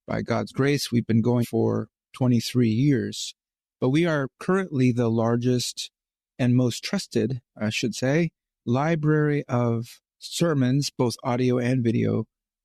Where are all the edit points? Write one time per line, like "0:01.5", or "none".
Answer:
0:01.4